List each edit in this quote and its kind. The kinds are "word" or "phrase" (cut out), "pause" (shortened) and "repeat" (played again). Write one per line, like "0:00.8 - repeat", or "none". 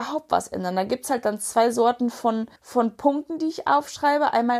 0:02.6 - pause